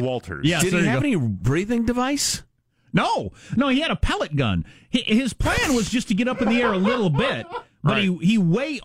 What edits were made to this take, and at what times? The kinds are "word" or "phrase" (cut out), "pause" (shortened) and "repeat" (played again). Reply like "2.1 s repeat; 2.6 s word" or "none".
none